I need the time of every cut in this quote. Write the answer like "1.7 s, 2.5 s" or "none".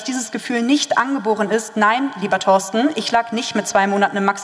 none